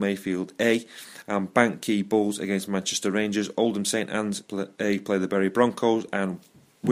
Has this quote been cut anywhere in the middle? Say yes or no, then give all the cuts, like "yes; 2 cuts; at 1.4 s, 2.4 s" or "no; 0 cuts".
no; 0 cuts